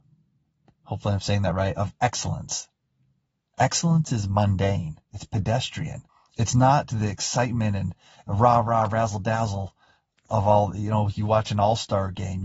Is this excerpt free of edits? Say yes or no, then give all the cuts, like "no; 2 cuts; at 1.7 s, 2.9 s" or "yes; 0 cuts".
no; 2 cuts; at 5.0 s, 6.1 s